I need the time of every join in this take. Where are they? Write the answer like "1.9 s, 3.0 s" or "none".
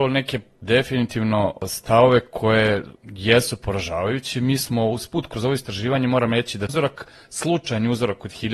3.0 s, 6.7 s